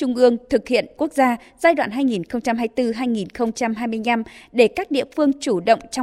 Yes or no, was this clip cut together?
yes